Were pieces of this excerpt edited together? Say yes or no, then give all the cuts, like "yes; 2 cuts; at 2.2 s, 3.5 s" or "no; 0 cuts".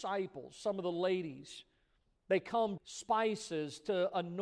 yes; 1 cut; at 2.8 s